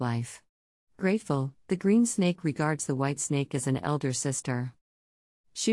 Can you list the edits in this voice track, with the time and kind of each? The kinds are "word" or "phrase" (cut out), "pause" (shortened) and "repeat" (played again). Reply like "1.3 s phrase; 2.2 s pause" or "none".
none